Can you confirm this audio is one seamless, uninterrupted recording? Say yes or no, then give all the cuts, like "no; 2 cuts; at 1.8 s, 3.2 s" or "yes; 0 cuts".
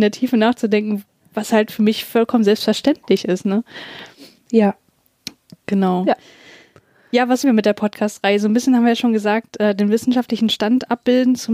no; 1 cut; at 7.4 s